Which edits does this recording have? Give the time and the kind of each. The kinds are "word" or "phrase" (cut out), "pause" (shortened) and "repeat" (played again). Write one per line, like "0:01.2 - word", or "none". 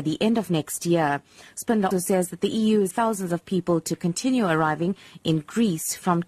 0:01.9 - word
0:02.9 - word